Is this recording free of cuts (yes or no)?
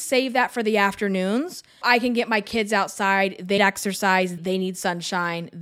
no